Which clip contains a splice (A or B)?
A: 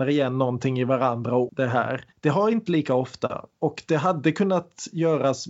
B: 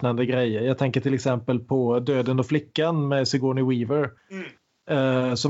A